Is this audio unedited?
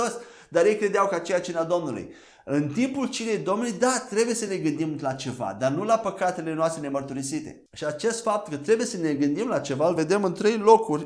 yes; 0 cuts

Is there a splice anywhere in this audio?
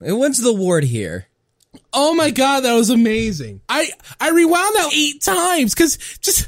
yes; 2 cuts; at 3.6 s, 4.9 s

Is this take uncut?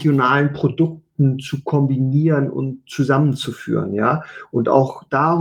yes; 0 cuts

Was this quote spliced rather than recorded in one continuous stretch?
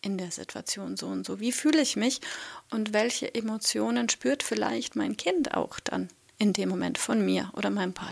no; 0 cuts

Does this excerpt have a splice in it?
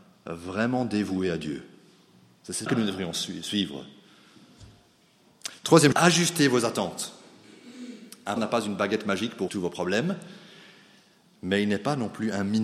yes; 4 cuts; at 2.7 s, 5.9 s, 8.4 s, 9.5 s

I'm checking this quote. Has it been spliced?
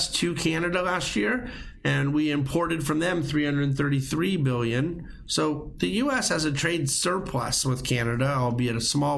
no; 0 cuts

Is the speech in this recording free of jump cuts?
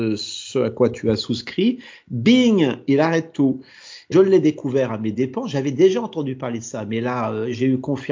no; 1 cut; at 4.1 s

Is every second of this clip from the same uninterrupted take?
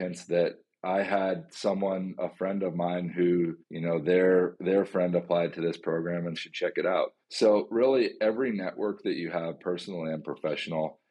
no; 3 cuts; at 3.6 s, 6.4 s, 7.2 s

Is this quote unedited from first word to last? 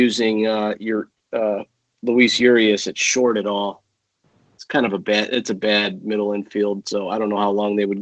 yes; 0 cuts

